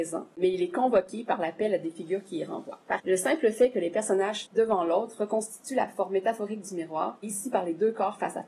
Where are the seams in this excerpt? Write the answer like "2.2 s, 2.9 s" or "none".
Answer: 3.0 s, 4.4 s, 7.2 s